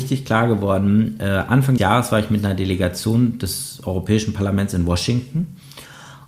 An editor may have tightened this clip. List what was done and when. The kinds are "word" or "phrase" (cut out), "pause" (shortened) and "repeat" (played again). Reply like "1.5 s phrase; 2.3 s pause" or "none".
1.8 s word